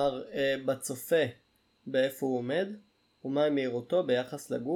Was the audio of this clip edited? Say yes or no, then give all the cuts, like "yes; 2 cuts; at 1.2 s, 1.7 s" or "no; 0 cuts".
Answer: no; 0 cuts